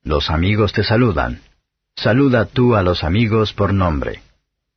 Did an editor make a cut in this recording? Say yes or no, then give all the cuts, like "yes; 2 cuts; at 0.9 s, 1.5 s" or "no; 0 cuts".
no; 0 cuts